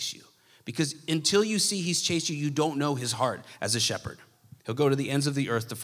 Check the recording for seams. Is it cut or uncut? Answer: cut